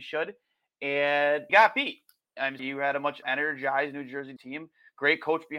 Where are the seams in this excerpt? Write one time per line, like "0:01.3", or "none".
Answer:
0:01.5
0:02.6
0:03.2
0:04.4